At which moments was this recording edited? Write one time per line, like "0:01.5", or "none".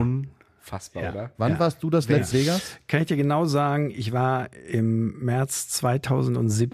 0:02.3